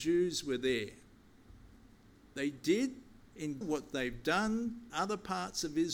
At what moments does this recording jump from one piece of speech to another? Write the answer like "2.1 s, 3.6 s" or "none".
2.1 s, 3.6 s, 4.9 s